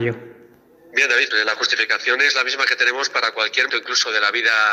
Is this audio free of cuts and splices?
no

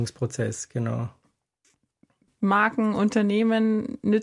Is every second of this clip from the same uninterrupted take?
yes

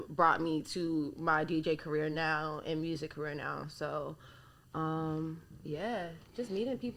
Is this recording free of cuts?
yes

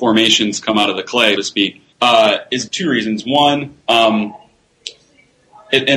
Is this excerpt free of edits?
no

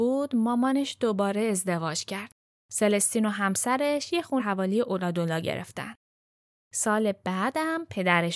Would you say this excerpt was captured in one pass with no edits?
no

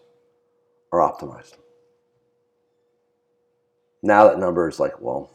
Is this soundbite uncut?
yes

